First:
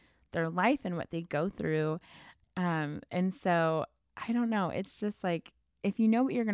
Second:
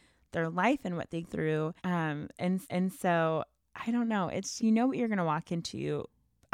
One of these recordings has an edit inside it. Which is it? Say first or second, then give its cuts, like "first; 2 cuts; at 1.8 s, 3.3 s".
second; 4 cuts; at 1.2 s, 1.8 s, 2.6 s, 4.6 s